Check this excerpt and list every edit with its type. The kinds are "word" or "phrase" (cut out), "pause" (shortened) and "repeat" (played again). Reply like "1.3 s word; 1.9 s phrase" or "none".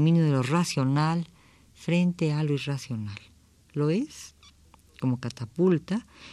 none